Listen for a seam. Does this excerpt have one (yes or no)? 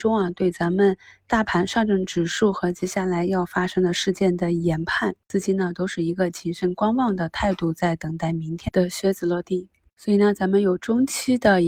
yes